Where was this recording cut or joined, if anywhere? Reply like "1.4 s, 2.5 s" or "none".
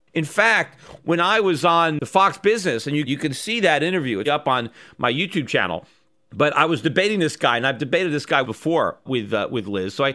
3.1 s, 4.2 s, 8.4 s, 9.1 s